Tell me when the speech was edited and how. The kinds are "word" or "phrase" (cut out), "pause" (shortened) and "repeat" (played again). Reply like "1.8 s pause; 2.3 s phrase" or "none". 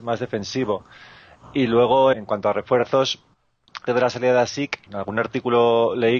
2.1 s word; 3.9 s word; 4.9 s word